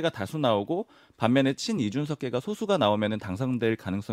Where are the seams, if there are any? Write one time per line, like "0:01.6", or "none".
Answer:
none